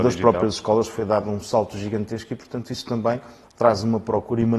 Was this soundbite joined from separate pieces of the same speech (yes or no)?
no